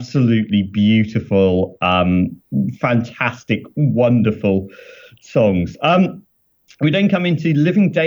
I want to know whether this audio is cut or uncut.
uncut